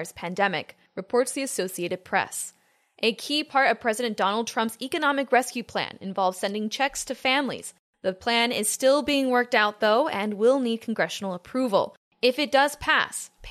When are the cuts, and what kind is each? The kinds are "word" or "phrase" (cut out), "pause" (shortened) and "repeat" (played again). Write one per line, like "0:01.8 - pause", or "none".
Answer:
none